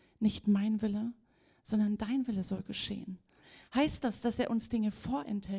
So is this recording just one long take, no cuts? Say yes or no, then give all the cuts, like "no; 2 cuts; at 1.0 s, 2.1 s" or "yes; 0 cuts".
yes; 0 cuts